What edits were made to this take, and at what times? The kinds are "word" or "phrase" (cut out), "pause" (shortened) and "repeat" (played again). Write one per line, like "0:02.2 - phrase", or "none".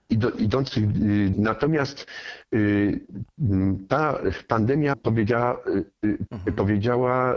0:01.3 - word
0:04.9 - word
0:06.3 - word